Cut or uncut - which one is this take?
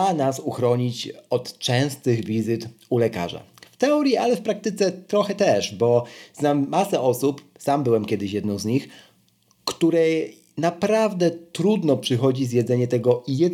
uncut